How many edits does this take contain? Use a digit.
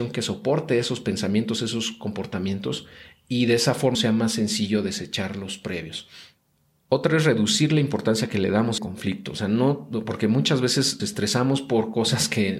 3